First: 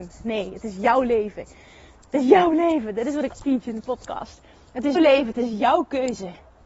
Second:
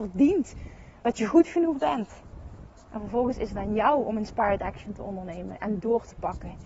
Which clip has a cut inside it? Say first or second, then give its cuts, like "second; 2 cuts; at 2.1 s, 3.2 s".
first; 2 cuts; at 3.4 s, 5.0 s